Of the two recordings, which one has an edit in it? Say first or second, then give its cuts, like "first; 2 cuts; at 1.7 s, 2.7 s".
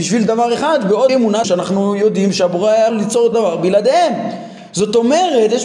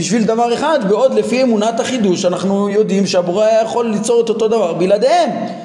first; 4 cuts; at 1.1 s, 1.4 s, 2.9 s, 3.3 s